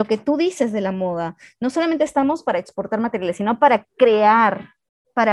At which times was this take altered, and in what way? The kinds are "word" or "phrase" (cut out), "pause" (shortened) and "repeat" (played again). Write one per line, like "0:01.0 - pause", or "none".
none